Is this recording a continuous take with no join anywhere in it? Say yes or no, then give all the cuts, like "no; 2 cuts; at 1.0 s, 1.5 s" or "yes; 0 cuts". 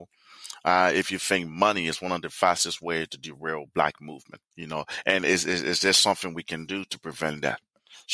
no; 1 cut; at 4.5 s